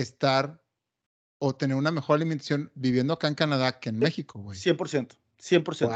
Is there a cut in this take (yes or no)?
no